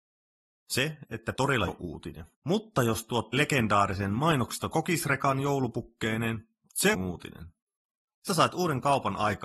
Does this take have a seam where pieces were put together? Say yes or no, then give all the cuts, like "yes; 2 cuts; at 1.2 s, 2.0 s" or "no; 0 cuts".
yes; 7 cuts; at 1.4 s, 1.7 s, 2.3 s, 3.3 s, 4.7 s, 6.9 s, 8.3 s